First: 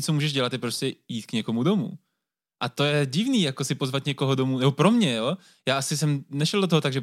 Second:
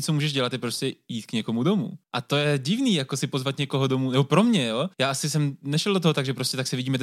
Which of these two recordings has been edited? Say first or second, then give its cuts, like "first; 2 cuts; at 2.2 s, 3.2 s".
second; 2 cuts; at 2.0 s, 4.9 s